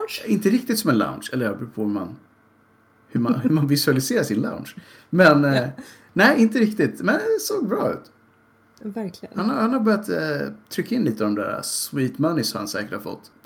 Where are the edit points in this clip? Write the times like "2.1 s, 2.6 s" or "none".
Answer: none